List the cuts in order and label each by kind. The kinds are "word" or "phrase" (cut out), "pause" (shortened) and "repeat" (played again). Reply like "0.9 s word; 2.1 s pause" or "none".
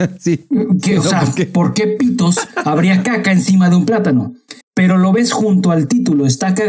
4.6 s pause